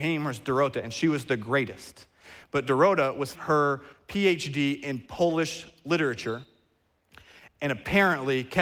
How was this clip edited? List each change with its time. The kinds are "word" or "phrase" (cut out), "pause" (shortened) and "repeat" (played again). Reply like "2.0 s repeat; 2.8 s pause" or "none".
3.3 s word